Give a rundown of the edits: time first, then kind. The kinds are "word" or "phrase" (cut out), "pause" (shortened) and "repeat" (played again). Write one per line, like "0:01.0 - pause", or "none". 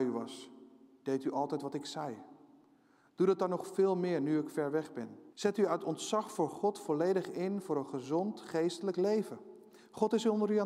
0:05.3 - pause